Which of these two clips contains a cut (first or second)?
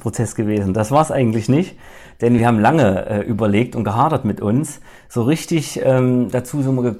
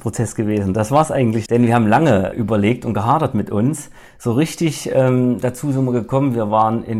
second